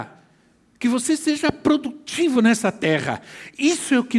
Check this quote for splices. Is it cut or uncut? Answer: uncut